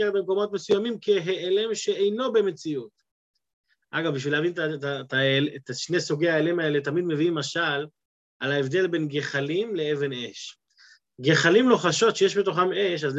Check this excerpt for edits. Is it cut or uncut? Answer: uncut